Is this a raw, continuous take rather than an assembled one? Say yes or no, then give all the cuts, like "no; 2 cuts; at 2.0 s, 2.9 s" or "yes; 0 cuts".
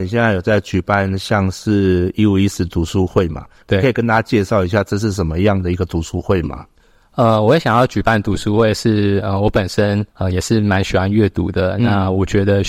no; 2 cuts; at 6.7 s, 10.1 s